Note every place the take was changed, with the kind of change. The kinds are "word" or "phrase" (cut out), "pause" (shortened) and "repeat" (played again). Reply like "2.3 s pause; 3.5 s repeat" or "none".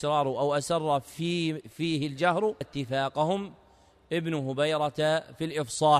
2.6 s phrase